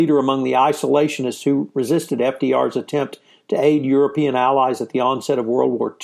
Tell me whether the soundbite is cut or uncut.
uncut